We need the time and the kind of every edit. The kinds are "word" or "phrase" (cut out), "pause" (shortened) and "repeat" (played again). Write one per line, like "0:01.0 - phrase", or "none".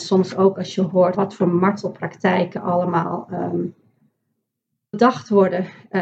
0:01.1 - word
0:04.9 - word